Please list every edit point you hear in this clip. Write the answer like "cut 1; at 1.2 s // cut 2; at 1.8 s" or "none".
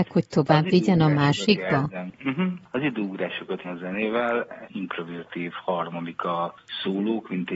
cut 1; at 3.6 s // cut 2; at 4.6 s

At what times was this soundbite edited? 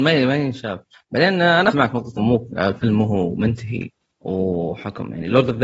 cut 1; at 1.7 s // cut 2; at 2.2 s

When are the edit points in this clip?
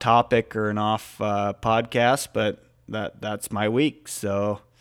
none

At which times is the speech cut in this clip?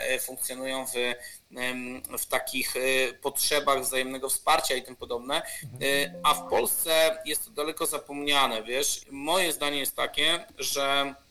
cut 1; at 9.0 s

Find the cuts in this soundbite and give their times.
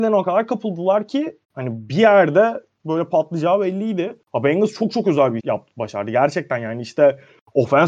cut 1; at 1.4 s // cut 2; at 4.2 s // cut 3; at 5.4 s

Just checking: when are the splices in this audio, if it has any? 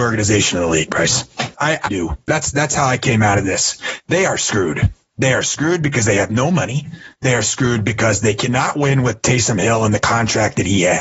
cut 1; at 1.5 s // cut 2; at 1.9 s

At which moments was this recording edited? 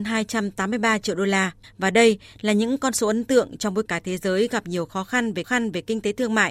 cut 1; at 1.6 s // cut 2; at 3.9 s // cut 3; at 5.4 s

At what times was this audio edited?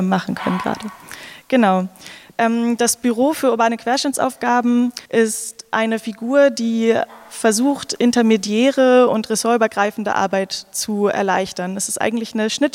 cut 1; at 5.0 s

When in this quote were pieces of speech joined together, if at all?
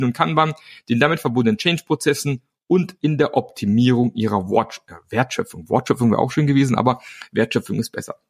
none

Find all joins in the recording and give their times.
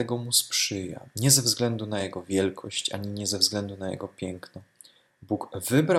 none

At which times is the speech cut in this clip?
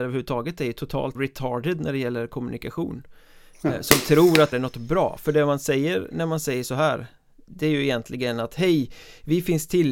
cut 1; at 1.2 s // cut 2; at 4.5 s

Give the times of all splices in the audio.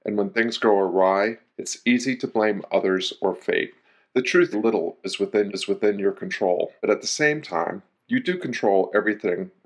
cut 1; at 1.5 s // cut 2; at 3.8 s // cut 3; at 4.5 s // cut 4; at 5.5 s // cut 5; at 6.8 s

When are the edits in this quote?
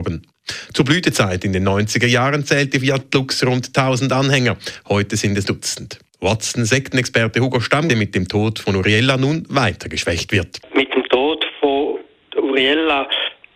cut 1; at 5.5 s // cut 2; at 7.9 s

